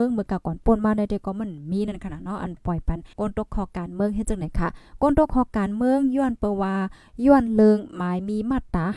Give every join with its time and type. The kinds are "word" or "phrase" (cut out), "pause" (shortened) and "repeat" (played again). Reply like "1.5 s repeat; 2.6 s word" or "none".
3.1 s pause